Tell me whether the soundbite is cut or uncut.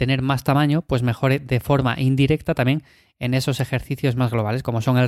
uncut